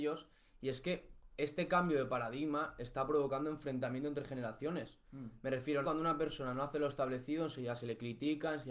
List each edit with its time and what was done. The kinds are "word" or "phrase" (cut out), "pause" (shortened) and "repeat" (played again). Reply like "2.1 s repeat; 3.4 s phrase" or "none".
5.8 s word